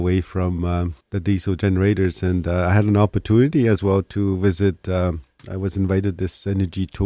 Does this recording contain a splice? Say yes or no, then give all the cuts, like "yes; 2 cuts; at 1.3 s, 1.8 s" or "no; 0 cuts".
yes; 1 cut; at 1.0 s